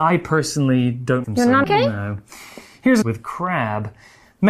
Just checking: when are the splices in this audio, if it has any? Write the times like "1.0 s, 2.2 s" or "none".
1.2 s, 1.6 s, 3.0 s